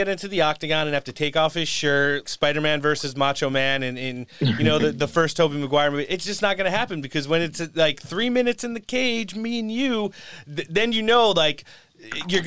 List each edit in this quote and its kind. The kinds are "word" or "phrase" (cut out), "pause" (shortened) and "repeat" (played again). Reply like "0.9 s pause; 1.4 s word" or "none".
2.2 s word